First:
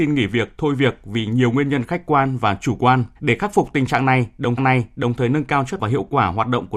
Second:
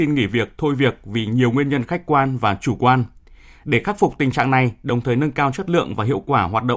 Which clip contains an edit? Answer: first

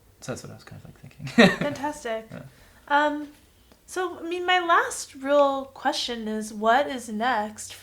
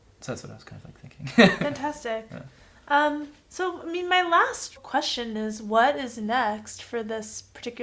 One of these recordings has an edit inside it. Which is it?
second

